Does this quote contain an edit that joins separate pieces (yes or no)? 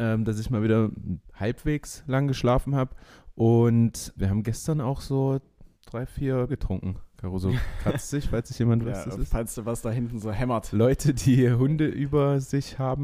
yes